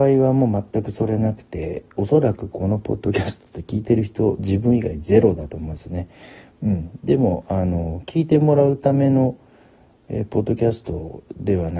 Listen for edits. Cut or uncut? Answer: uncut